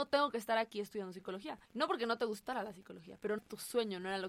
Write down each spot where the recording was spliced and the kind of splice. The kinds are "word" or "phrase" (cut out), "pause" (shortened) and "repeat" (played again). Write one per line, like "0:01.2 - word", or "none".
0:01.7 - pause
0:03.4 - phrase